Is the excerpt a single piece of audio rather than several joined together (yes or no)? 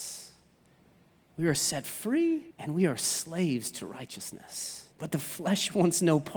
no